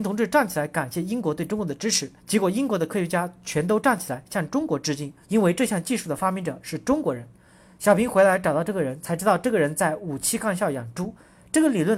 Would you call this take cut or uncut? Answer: cut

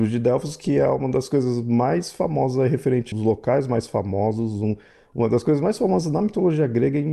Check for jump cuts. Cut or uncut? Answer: cut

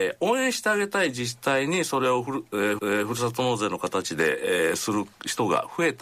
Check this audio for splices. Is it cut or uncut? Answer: cut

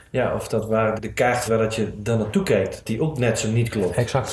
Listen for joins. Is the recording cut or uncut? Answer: cut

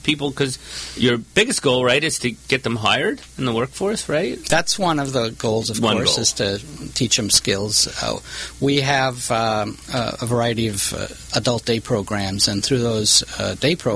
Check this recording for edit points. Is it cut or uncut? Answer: uncut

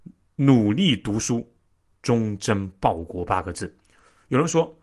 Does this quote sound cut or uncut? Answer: uncut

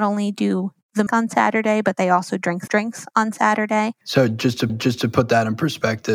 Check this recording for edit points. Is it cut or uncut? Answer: cut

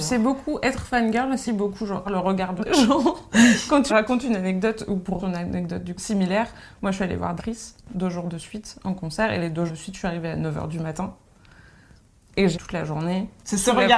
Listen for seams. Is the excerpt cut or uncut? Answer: cut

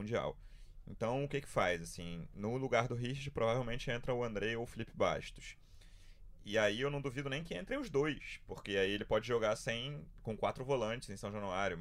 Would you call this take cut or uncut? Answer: uncut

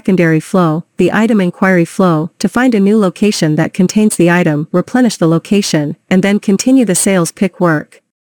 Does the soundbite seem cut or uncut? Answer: uncut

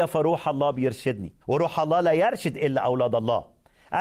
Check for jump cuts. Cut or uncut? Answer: cut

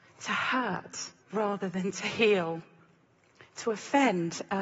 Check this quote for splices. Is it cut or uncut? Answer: cut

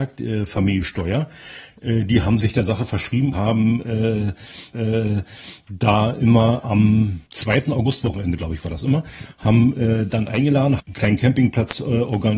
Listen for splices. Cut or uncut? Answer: cut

